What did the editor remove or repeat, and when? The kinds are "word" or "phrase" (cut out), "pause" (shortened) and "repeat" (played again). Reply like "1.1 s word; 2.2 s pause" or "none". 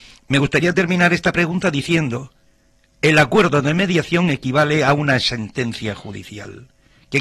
none